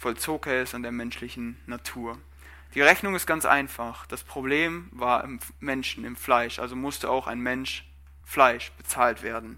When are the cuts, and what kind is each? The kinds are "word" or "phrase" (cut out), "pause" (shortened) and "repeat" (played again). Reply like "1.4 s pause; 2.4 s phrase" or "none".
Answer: none